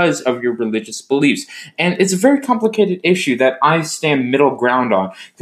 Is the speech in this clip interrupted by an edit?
no; 0 cuts

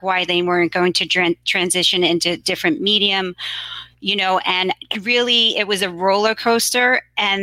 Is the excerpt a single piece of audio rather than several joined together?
yes; 0 cuts

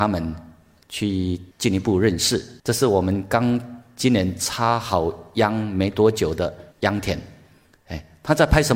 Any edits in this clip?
yes; 3 cuts; at 1.5 s, 2.6 s, 6.7 s

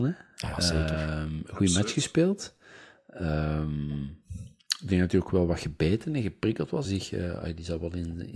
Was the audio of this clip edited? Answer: yes; 1 cut; at 6.8 s

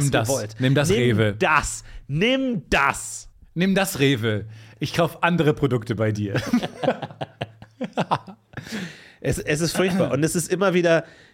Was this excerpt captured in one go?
no; 1 cut; at 3.3 s

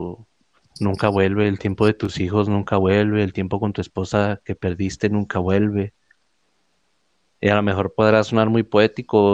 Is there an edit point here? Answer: no; 0 cuts

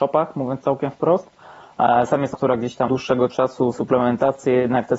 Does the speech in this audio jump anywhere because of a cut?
yes; 3 cuts; at 2.3 s, 2.9 s, 3.7 s

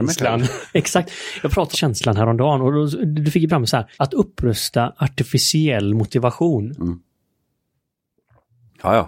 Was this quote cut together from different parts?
yes; 3 cuts; at 1.7 s, 3.5 s, 3.9 s

